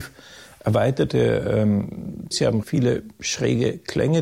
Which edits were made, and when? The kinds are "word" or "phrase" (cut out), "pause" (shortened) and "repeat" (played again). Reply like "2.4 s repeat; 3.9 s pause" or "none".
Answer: 2.3 s word; 2.6 s word